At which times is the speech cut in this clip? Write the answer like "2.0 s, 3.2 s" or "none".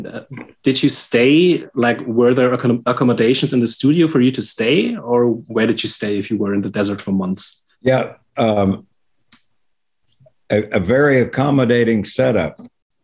7.7 s